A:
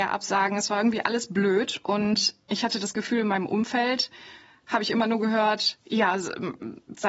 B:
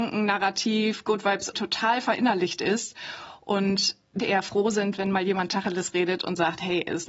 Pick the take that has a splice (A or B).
B